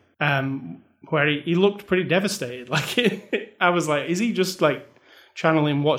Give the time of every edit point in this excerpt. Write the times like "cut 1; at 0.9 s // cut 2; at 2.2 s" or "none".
none